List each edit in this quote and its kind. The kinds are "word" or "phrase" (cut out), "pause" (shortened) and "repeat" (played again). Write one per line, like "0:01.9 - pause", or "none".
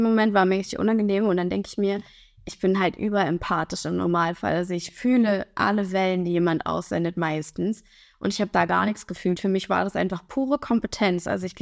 none